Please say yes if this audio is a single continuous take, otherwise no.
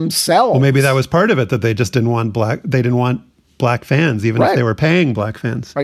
yes